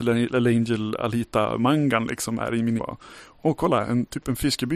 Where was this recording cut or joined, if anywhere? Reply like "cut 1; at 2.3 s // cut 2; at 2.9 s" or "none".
cut 1; at 2.8 s